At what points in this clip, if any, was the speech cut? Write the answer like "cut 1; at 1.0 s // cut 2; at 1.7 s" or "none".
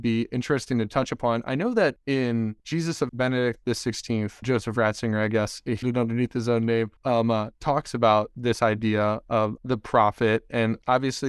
cut 1; at 2.6 s // cut 2; at 3.1 s // cut 3; at 4.4 s // cut 4; at 5.8 s // cut 5; at 7.0 s